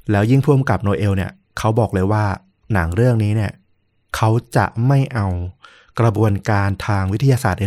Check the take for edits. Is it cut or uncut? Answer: uncut